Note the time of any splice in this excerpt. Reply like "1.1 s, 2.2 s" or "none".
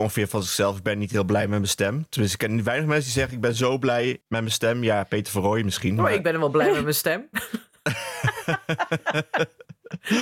4.2 s